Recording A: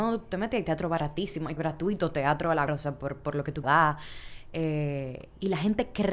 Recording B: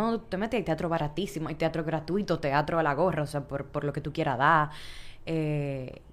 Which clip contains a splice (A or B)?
A